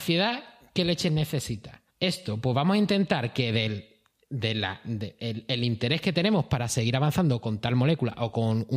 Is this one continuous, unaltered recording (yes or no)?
no